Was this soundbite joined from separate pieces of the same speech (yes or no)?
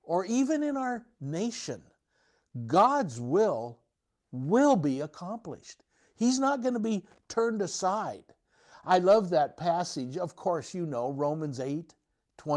no